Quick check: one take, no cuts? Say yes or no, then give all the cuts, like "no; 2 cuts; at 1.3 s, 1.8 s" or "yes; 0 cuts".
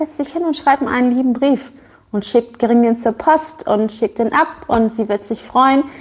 yes; 0 cuts